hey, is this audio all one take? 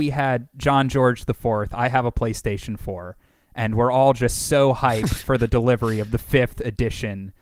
yes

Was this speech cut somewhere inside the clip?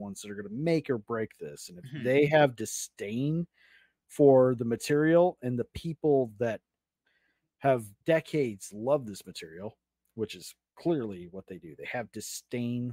yes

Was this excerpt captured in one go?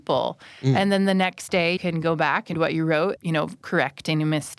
no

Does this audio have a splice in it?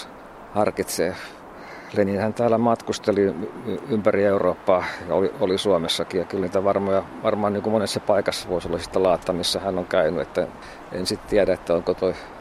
no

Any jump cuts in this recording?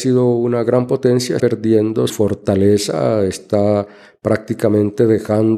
yes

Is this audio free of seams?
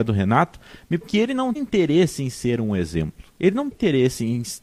no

